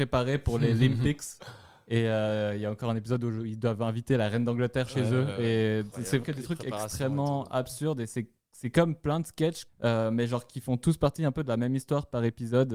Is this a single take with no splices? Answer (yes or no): no